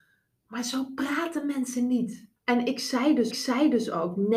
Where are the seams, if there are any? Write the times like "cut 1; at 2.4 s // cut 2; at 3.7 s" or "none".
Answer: cut 1; at 2.4 s // cut 2; at 3.3 s